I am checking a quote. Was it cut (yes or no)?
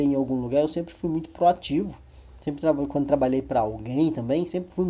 no